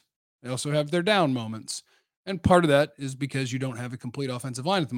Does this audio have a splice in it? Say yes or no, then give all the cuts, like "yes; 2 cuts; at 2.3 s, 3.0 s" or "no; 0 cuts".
no; 0 cuts